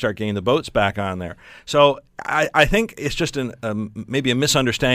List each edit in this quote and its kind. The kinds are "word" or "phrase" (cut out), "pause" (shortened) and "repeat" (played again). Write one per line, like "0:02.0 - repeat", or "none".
none